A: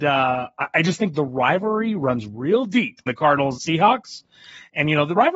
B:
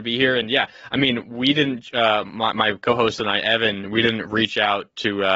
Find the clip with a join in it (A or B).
A